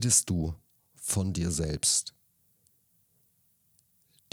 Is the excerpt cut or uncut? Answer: uncut